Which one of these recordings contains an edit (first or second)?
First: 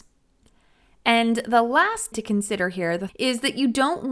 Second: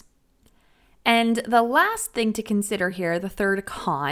first